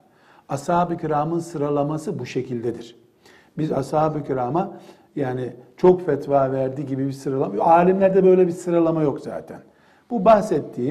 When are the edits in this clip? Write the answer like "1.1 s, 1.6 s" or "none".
none